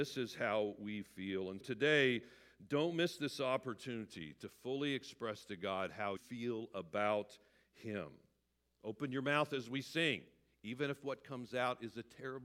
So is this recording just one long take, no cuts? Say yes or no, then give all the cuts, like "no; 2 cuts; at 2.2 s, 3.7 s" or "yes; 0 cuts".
no; 2 cuts; at 1.6 s, 6.2 s